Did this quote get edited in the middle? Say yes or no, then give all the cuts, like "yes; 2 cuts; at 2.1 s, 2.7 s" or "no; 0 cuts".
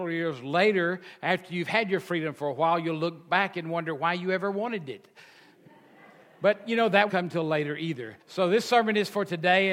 yes; 2 cuts; at 7.1 s, 8.2 s